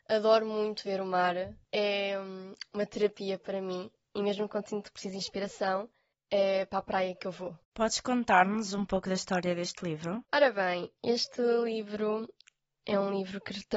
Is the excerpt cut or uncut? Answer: cut